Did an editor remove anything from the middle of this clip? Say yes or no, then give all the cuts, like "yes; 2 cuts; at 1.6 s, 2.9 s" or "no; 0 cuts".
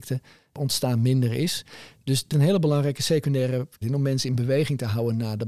yes; 2 cuts; at 2.3 s, 3.8 s